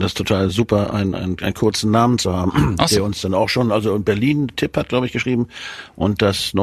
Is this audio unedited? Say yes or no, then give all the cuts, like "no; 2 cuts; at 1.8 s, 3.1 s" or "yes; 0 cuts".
yes; 0 cuts